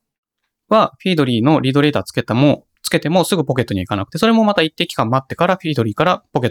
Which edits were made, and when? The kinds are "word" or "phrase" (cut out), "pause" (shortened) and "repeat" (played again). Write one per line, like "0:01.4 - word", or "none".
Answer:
none

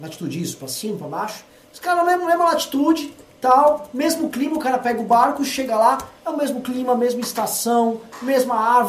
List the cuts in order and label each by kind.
0:01.6 - pause

